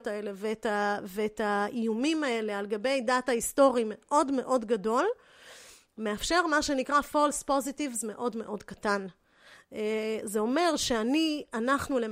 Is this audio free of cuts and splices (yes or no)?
yes